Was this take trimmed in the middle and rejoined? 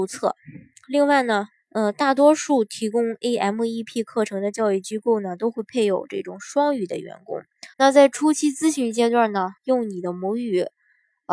yes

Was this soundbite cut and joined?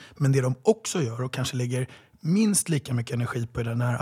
no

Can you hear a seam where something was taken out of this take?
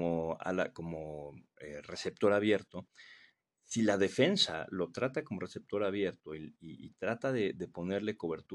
no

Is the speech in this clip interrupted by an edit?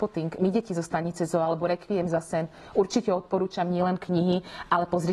no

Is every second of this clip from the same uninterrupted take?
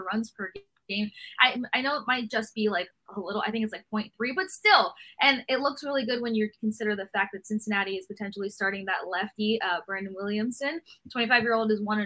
yes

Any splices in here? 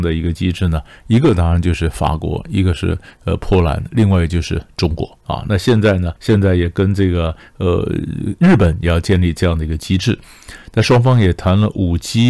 yes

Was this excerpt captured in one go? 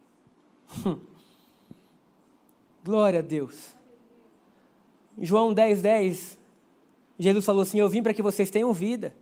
yes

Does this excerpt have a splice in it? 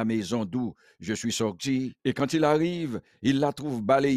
yes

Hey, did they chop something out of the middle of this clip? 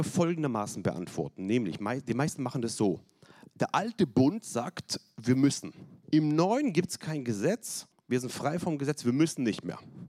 yes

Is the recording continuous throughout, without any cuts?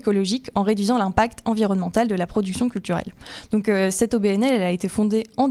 yes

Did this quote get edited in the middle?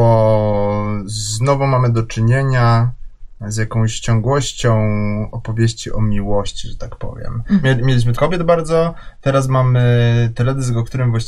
yes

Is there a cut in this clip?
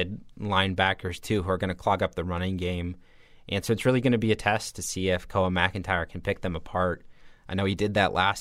no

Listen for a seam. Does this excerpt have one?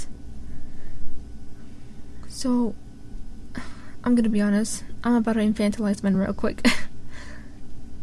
no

